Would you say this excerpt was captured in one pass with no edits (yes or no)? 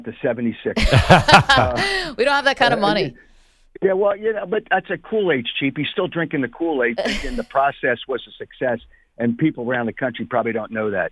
yes